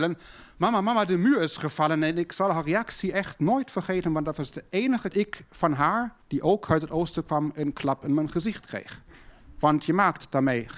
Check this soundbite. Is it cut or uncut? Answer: cut